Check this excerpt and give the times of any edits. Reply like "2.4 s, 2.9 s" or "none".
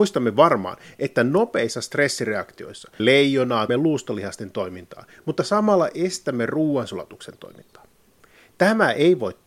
3.0 s, 3.7 s